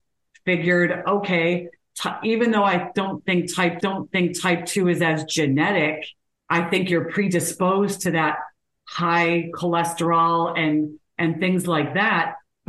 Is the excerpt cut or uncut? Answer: cut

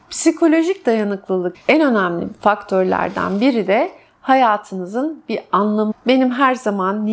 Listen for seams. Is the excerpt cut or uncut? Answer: cut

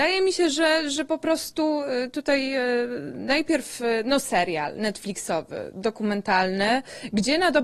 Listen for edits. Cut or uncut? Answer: cut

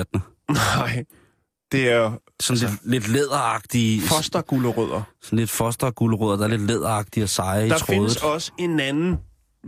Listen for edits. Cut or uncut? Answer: uncut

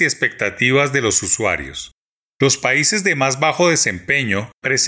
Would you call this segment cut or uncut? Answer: uncut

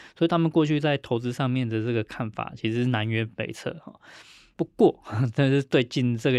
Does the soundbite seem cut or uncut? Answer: uncut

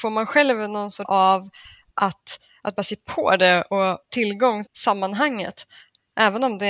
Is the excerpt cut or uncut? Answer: cut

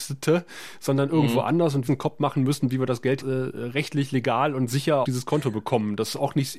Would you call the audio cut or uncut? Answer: cut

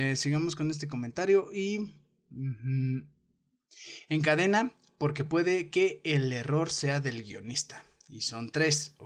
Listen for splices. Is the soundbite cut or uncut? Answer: uncut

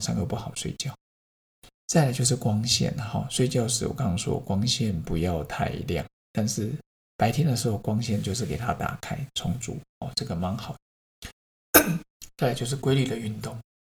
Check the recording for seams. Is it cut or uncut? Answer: uncut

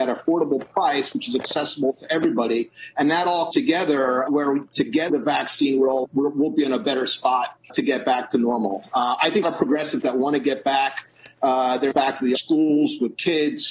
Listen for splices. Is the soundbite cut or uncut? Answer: cut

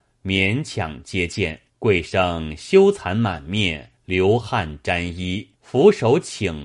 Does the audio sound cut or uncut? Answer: cut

